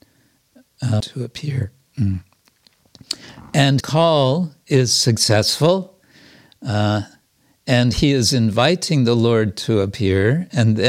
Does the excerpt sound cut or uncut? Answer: cut